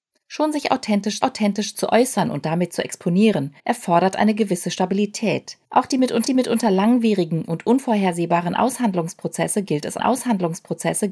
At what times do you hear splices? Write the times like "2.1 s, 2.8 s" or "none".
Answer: 1.2 s, 3.6 s, 5.7 s, 6.3 s, 10.0 s